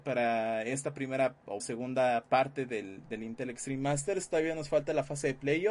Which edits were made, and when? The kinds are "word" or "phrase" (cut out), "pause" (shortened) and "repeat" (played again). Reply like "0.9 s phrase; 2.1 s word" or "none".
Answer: 1.6 s word